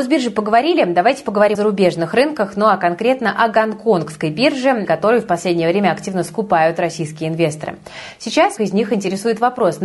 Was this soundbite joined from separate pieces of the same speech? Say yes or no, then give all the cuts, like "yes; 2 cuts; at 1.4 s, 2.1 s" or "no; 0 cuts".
yes; 3 cuts; at 1.5 s, 4.8 s, 8.6 s